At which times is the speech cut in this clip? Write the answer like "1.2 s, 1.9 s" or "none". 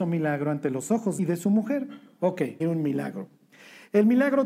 1.2 s, 2.6 s